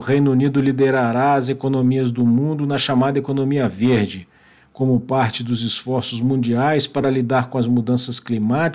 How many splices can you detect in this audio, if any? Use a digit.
0